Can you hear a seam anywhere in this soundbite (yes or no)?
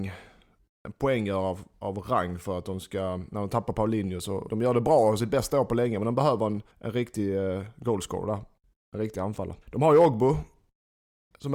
yes